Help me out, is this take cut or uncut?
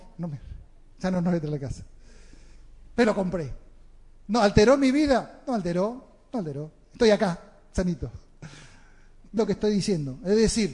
cut